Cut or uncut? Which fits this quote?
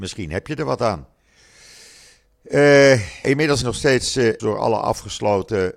cut